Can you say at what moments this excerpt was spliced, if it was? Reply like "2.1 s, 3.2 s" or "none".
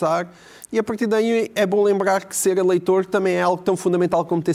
none